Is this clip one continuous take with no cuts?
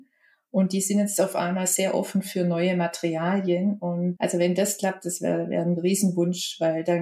no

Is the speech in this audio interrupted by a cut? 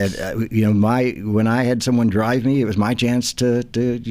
no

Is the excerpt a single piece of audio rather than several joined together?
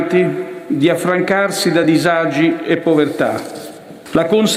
yes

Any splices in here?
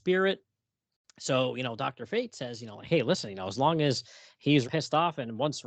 yes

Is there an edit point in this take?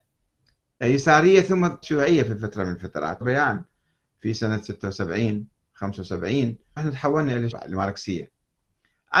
yes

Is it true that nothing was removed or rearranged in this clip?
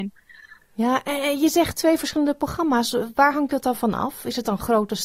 yes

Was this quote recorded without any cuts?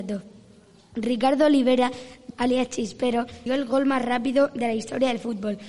no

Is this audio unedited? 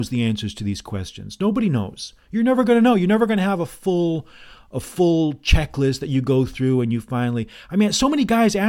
yes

